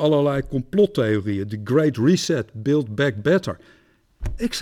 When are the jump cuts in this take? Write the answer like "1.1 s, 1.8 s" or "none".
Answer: none